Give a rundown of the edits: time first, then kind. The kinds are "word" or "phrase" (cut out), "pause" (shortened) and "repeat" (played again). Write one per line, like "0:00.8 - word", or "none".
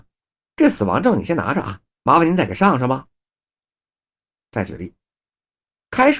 0:01.9 - phrase